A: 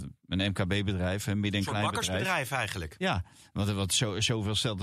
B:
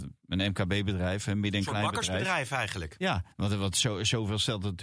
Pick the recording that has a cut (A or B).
B